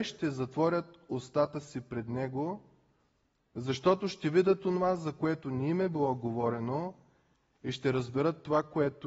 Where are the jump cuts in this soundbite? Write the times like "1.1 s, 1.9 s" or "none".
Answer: none